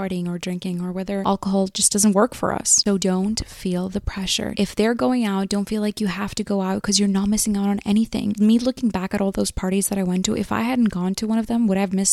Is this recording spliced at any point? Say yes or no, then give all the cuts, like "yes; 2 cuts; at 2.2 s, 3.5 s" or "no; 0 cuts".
no; 0 cuts